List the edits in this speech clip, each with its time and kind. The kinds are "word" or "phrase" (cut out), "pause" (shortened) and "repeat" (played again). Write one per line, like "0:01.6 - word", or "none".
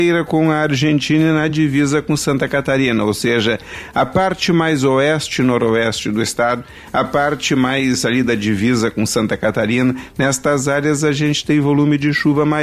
none